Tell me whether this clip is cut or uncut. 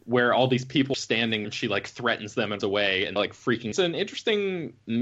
cut